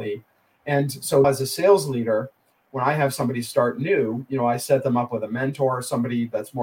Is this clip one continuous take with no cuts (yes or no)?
no